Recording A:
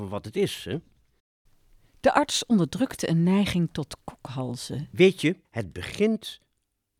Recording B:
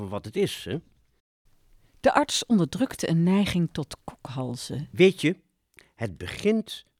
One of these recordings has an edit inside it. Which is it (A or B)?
A